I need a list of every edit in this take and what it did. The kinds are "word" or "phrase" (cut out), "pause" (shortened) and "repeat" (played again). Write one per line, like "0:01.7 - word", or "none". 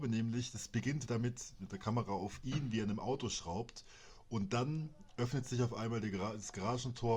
0:01.1 - word